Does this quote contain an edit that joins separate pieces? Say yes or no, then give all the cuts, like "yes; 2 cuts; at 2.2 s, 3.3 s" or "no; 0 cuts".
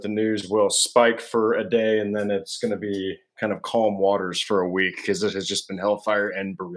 no; 0 cuts